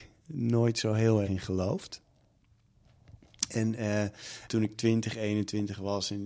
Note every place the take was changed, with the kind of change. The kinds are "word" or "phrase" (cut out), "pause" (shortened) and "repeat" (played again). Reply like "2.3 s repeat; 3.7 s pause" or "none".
1.2 s word; 4.5 s word